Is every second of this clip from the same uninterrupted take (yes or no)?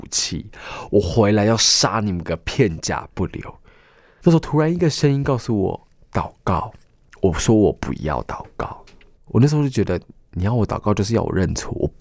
yes